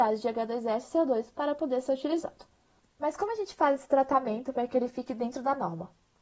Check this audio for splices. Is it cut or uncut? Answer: uncut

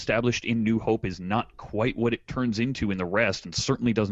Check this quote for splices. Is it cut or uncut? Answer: uncut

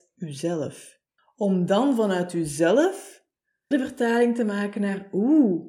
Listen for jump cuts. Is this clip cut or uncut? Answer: cut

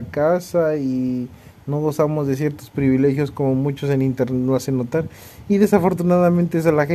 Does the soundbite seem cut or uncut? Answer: uncut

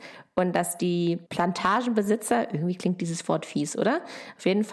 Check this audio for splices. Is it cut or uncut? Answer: cut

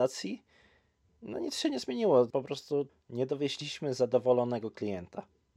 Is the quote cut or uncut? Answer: uncut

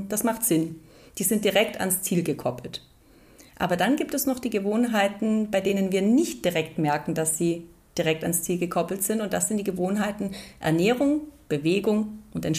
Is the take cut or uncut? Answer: uncut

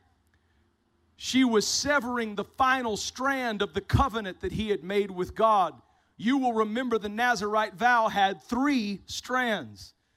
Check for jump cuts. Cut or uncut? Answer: uncut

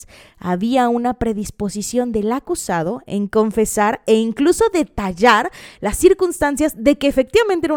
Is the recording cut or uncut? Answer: uncut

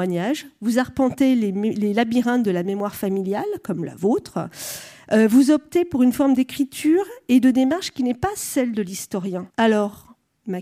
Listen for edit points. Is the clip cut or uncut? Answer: cut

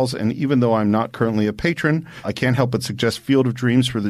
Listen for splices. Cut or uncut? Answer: cut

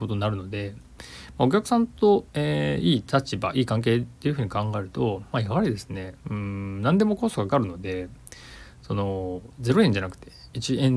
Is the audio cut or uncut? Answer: cut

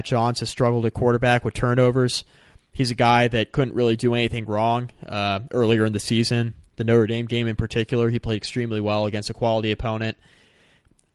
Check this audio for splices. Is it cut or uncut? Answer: uncut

